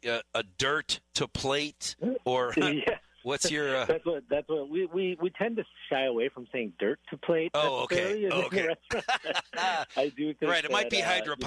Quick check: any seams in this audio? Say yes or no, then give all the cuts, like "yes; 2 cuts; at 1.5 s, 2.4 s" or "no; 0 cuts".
no; 0 cuts